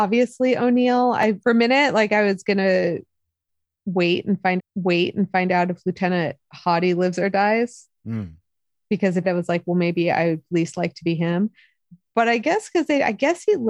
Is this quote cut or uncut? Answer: cut